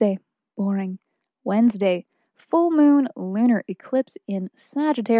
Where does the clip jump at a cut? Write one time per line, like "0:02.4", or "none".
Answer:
none